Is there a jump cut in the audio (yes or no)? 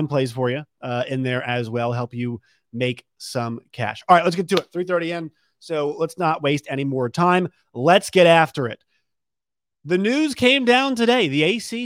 no